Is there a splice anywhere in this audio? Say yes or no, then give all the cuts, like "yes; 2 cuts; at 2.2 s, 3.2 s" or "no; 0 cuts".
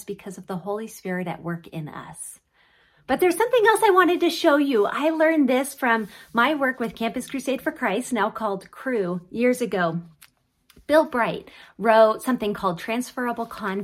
no; 0 cuts